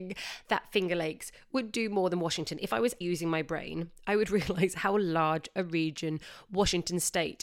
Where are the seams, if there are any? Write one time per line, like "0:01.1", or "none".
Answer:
0:03.0